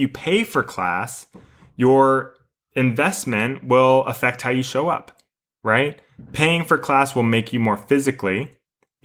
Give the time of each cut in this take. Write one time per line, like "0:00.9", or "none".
none